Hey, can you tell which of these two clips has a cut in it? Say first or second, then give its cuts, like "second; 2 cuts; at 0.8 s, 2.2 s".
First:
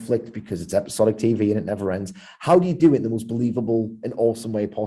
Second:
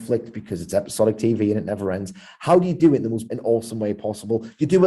second; 1 cut; at 3.3 s